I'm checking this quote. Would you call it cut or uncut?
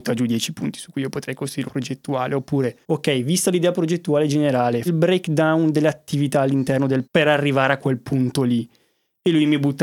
cut